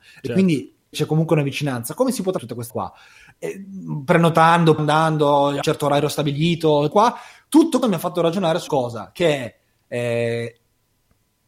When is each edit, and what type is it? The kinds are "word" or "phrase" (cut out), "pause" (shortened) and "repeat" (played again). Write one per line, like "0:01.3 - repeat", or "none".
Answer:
0:00.9 - word
0:02.4 - word
0:02.7 - word
0:04.8 - word
0:05.6 - word
0:06.9 - word
0:07.8 - word
0:08.7 - word